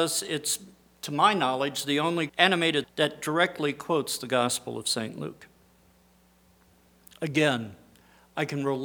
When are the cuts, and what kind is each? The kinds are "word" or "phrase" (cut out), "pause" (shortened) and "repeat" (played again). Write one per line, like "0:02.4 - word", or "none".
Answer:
0:02.3 - word
0:02.8 - word